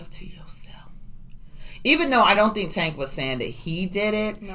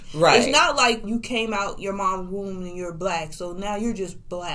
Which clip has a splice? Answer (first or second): second